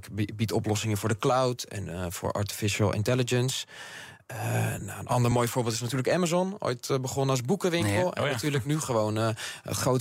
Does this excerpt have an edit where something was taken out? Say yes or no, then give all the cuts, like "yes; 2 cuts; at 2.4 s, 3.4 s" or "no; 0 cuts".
no; 0 cuts